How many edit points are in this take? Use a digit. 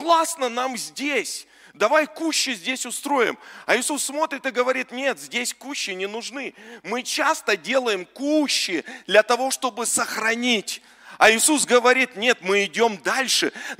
0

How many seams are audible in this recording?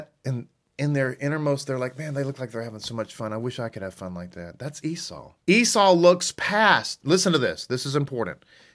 1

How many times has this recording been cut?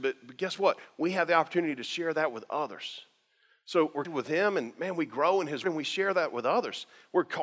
2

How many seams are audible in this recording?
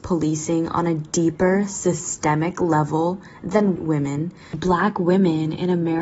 1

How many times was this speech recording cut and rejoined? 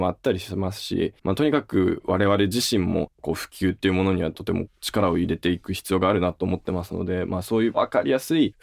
1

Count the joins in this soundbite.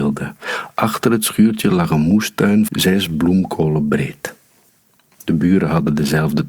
1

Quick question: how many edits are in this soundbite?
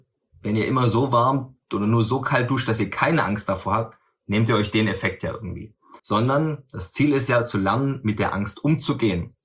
1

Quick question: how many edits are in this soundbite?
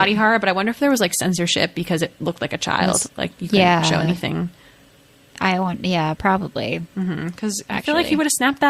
0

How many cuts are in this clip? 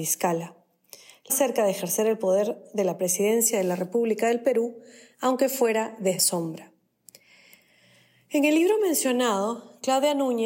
2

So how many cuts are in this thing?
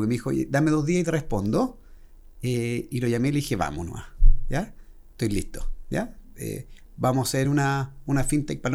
0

